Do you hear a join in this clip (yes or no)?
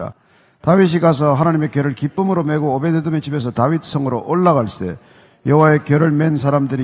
no